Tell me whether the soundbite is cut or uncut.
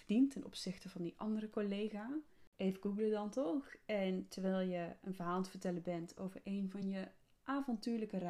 uncut